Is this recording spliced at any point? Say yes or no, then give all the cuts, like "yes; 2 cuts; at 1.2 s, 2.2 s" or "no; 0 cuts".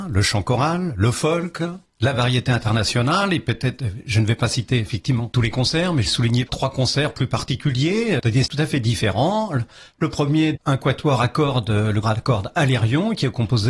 yes; 4 cuts; at 6.1 s, 6.5 s, 8.5 s, 12.0 s